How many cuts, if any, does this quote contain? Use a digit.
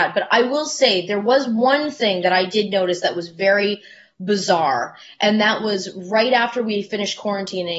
0